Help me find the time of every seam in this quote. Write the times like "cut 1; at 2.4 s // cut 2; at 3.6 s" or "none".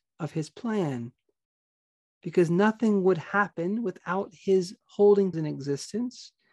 cut 1; at 5.3 s